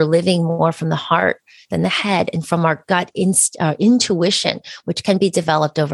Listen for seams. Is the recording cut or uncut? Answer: uncut